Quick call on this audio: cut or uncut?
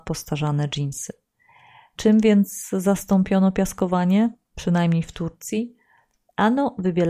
uncut